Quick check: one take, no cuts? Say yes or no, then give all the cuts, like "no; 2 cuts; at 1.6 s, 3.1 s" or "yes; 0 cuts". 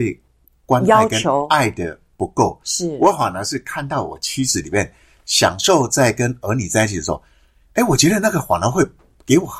yes; 0 cuts